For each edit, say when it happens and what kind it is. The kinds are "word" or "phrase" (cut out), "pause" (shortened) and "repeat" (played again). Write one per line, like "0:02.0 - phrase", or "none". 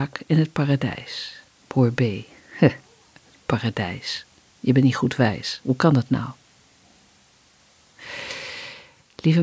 0:01.6 - pause